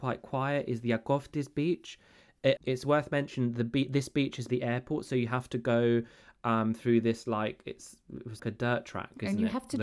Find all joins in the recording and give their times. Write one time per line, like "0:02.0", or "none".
0:02.6
0:04.5
0:08.4